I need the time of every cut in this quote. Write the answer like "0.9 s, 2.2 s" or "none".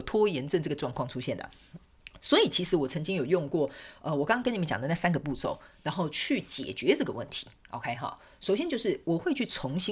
none